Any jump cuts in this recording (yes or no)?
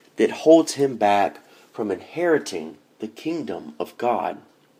no